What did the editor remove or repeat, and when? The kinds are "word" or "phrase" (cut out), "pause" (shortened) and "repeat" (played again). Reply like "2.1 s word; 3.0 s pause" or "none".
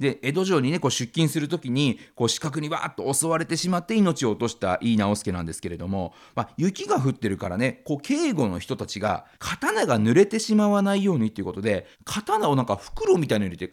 9.3 s pause; 11.9 s pause